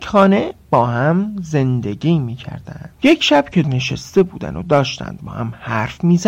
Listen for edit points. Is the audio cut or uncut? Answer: cut